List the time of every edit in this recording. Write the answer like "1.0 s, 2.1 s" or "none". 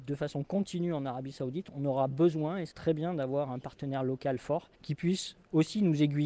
2.7 s, 4.7 s